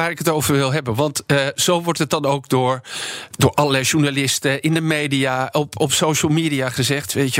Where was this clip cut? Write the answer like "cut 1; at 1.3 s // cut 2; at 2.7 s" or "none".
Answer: none